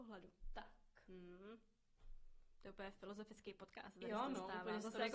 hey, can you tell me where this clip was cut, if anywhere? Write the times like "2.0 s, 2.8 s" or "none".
none